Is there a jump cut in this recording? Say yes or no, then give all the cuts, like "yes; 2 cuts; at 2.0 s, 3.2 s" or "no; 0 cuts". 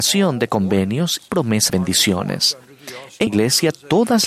yes; 3 cuts; at 1.3 s, 1.7 s, 3.3 s